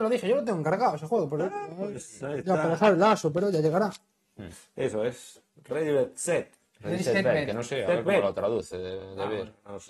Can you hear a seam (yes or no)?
no